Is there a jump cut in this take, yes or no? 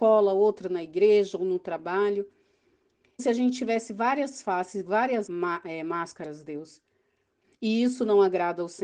yes